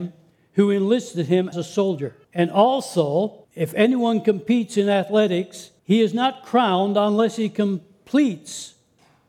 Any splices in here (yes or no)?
yes